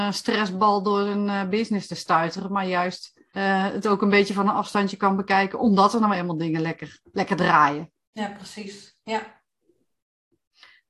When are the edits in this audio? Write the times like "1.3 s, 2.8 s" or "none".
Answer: 3.3 s, 7.0 s